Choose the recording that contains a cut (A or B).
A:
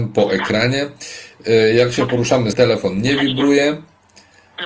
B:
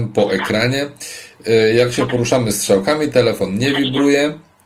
A